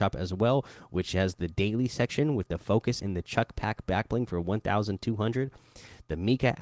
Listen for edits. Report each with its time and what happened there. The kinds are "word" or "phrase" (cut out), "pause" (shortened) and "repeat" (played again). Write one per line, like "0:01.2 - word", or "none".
0:03.0 - word